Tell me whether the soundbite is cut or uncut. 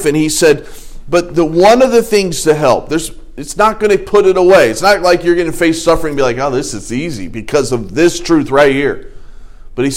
uncut